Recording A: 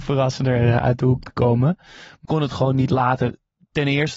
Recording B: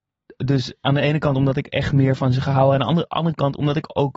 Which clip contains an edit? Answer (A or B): A